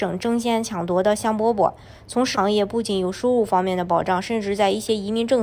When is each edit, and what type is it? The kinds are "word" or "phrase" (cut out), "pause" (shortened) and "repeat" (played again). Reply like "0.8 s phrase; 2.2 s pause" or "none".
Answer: 2.3 s word